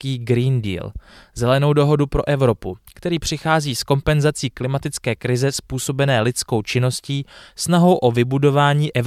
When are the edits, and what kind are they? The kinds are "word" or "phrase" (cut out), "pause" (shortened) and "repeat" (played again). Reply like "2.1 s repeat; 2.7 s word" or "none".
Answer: none